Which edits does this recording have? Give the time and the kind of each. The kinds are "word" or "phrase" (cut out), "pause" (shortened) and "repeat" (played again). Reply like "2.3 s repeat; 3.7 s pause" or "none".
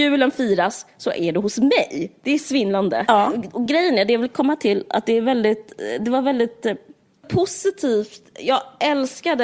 none